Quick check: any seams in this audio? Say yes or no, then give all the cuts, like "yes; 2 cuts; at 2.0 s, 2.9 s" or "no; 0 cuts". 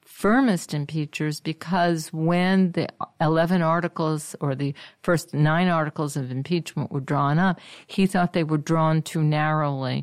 no; 0 cuts